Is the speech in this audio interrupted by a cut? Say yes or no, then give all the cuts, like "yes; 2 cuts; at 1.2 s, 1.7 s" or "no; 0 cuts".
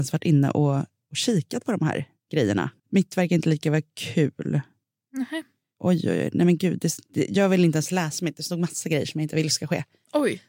yes; 1 cut; at 2.8 s